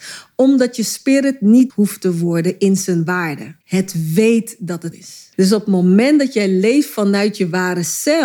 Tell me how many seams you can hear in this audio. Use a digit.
4